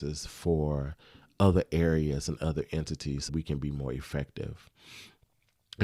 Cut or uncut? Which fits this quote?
cut